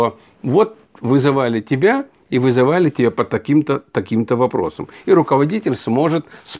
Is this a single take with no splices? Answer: yes; 0 cuts

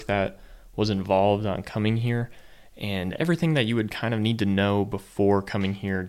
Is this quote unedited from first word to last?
yes; 0 cuts

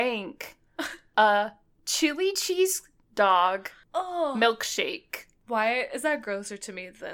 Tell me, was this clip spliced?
no; 0 cuts

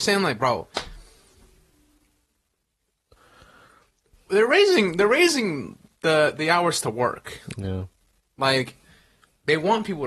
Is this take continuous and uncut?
yes; 0 cuts

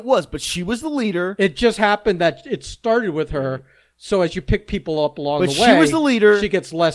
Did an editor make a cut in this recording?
no; 0 cuts

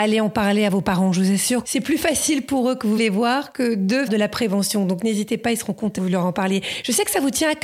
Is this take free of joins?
no; 4 cuts; at 1.6 s, 3.0 s, 4.1 s, 6.0 s

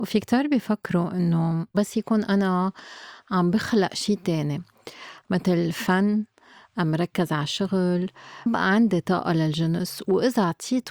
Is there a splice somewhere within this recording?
yes; 1 cut; at 8.5 s

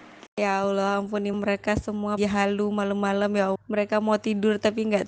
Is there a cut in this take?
yes; 3 cuts; at 1.3 s, 2.2 s, 3.6 s

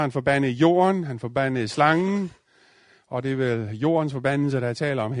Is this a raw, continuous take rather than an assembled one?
yes; 0 cuts

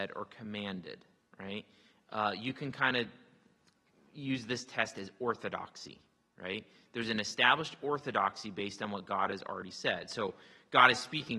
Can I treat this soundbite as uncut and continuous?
yes; 0 cuts

